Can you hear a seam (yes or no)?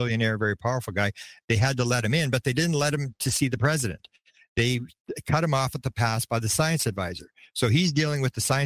no